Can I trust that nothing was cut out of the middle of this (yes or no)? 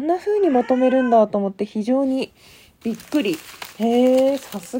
yes